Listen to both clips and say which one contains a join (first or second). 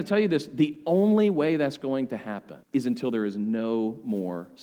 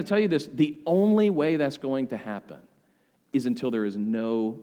first